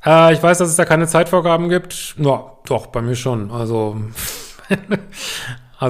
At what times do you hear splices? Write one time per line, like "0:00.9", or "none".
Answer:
none